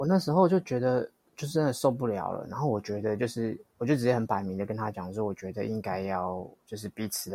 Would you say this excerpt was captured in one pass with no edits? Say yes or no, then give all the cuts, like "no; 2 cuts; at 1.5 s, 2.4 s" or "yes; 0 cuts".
yes; 0 cuts